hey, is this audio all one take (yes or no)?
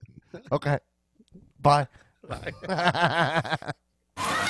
yes